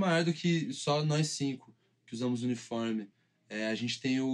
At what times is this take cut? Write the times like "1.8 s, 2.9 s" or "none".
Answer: none